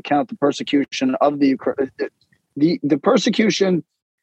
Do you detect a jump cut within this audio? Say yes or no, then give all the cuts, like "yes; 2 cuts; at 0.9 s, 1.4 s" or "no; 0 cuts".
no; 0 cuts